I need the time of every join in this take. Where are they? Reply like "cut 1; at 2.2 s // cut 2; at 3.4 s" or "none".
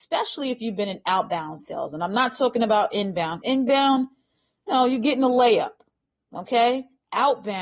cut 1; at 3.4 s // cut 2; at 4.7 s

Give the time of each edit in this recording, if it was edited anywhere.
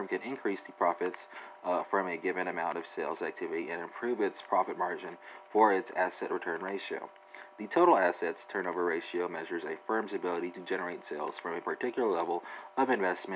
none

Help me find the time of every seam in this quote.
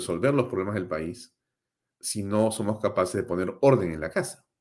none

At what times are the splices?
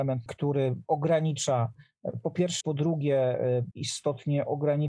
cut 1; at 2.6 s // cut 2; at 3.7 s

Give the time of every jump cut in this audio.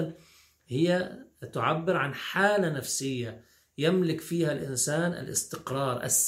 none

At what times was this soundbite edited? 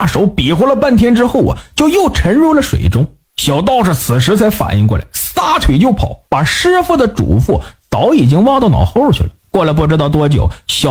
cut 1; at 3.3 s // cut 2; at 6.2 s // cut 3; at 9.4 s

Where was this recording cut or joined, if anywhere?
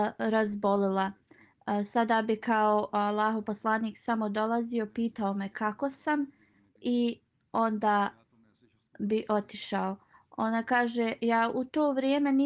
none

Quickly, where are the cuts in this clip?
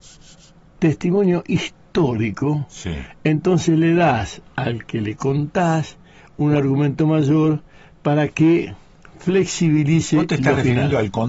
none

